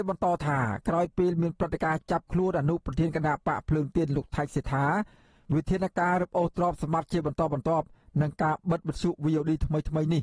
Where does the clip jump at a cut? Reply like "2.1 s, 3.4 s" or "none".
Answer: none